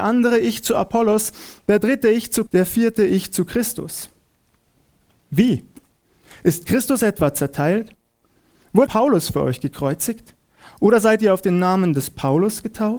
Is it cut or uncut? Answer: cut